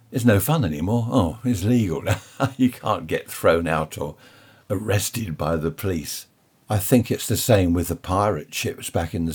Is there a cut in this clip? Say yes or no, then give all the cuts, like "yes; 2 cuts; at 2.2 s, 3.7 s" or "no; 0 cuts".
no; 0 cuts